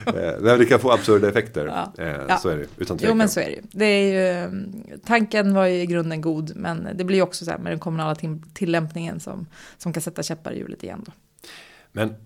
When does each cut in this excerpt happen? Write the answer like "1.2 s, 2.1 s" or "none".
none